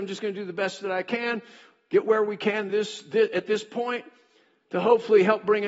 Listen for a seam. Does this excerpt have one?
no; 0 cuts

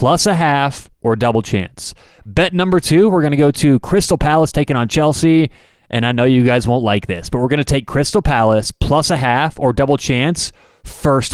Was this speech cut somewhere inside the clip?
no; 0 cuts

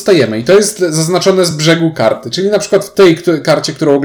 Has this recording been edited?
no; 0 cuts

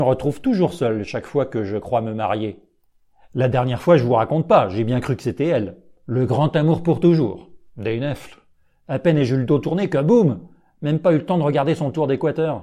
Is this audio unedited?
yes; 0 cuts

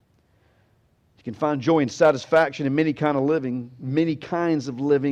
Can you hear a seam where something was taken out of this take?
no; 0 cuts

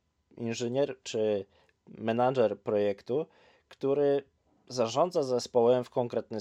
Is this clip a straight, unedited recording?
yes; 0 cuts

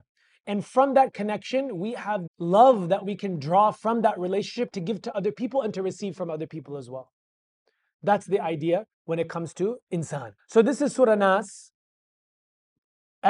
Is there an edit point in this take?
yes; 3 cuts; at 2.3 s, 8.9 s, 10.4 s

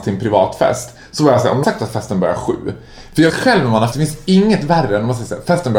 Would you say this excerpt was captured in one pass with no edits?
no; 3 cuts; at 1.6 s, 3.3 s, 3.9 s

